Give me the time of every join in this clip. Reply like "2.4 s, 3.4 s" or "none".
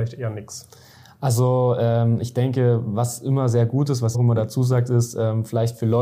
4.1 s